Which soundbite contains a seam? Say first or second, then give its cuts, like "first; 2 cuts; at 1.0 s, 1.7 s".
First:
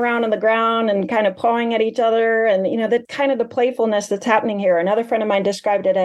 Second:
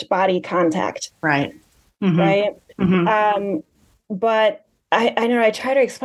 first; 1 cut; at 3.0 s